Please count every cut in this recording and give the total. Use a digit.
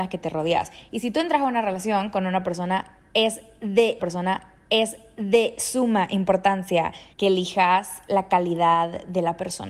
2